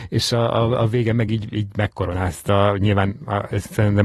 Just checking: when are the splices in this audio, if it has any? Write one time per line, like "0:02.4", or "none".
none